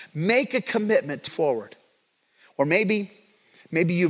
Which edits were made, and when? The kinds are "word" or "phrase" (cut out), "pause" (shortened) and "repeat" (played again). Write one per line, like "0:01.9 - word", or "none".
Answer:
0:01.3 - word